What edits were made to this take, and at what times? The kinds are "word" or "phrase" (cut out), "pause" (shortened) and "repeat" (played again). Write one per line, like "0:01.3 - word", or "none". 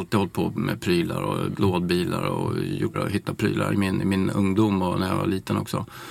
0:01.5 - word
0:02.9 - word
0:03.4 - word
0:03.7 - word